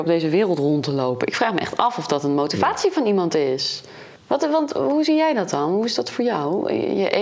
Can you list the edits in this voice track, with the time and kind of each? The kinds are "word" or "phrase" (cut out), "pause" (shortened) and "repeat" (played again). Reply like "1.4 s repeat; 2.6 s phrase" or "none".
4.2 s pause